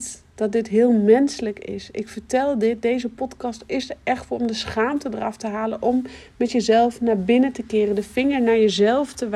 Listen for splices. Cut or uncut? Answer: uncut